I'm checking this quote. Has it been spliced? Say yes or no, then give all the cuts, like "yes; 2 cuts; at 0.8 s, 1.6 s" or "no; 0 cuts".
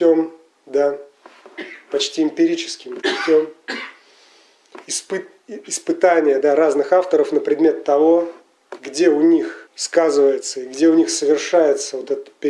yes; 2 cuts; at 3.0 s, 9.7 s